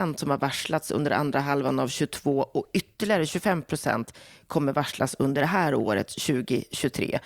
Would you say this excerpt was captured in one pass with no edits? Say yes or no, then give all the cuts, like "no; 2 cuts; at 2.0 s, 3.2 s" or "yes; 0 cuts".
yes; 0 cuts